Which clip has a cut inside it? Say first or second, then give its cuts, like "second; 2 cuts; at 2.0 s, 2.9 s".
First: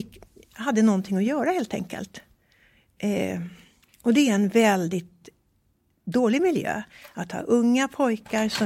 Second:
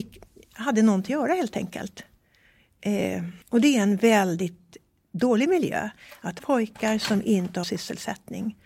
second; 5 cuts; at 1.1 s, 3.4 s, 4.9 s, 6.4 s, 7.6 s